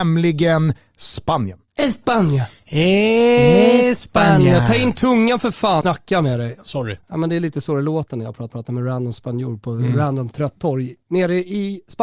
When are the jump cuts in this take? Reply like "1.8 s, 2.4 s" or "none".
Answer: 1.7 s, 5.8 s, 7.0 s, 8.5 s